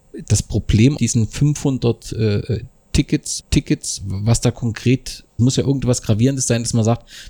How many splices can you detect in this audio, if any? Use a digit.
3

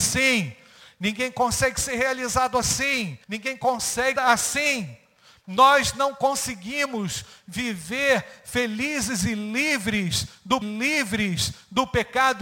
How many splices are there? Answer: 3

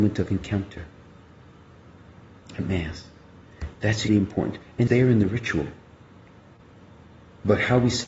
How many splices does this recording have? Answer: 2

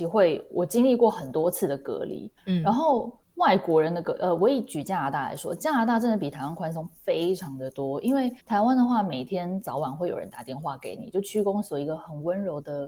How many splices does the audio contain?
3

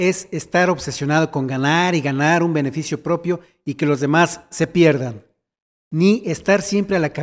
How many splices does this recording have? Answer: 0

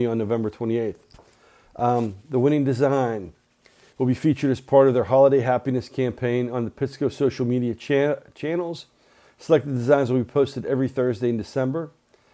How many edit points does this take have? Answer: 0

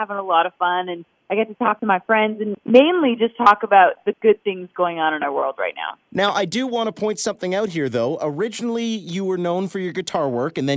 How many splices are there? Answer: 0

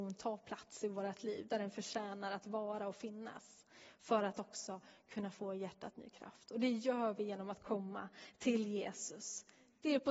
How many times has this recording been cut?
0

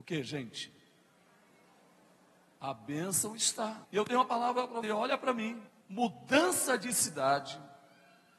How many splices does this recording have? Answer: 3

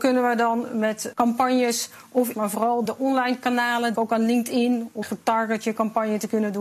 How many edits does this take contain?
5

